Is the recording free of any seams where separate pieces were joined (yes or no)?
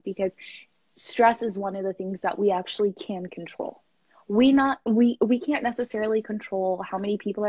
yes